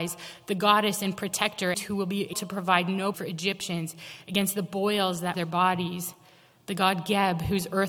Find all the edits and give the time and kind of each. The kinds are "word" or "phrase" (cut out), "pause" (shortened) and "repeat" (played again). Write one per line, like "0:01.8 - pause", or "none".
0:01.7 - word
0:02.3 - word
0:03.1 - word
0:05.3 - word